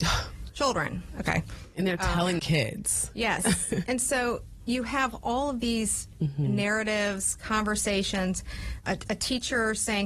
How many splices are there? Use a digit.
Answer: 3